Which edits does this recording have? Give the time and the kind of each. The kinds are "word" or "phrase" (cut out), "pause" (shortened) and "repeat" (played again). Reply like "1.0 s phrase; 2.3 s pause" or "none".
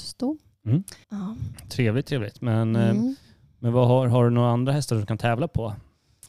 1.0 s pause

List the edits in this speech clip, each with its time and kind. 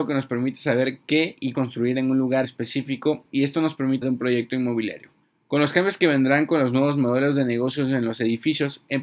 1.5 s phrase; 2.4 s word; 4.0 s phrase; 5.2 s pause

